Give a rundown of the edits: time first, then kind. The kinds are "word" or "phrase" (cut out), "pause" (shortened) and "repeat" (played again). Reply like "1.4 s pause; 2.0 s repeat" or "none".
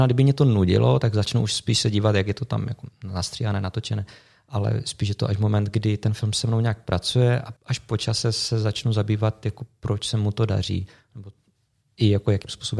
7.6 s pause

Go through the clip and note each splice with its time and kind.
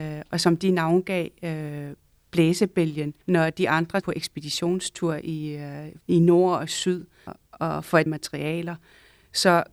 3.2 s pause; 4.0 s word; 6.0 s pause; 7.3 s word; 8.1 s word

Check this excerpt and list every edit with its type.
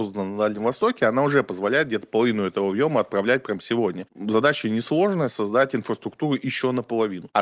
none

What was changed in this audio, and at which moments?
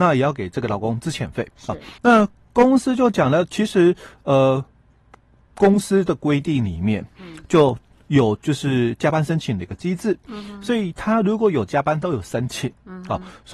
2.0 s pause

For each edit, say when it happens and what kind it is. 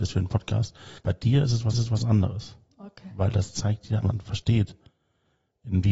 1.0 s pause; 1.7 s repeat; 4.0 s phrase

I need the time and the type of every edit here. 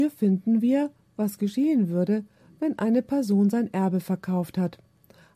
none

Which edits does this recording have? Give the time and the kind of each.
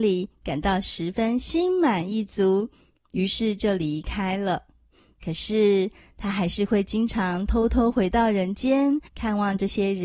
9.1 s pause

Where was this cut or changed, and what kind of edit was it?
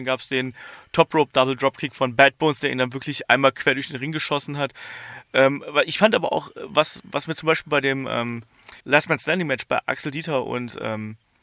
8.8 s pause

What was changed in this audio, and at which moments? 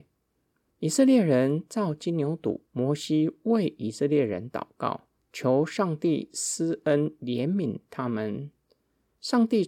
2.7 s pause; 5.2 s pause

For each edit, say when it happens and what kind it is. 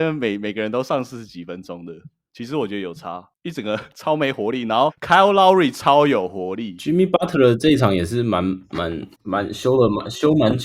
4.9 s word; 9.1 s pause

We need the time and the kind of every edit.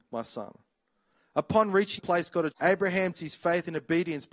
2.0 s word; 2.5 s word; 3.1 s word

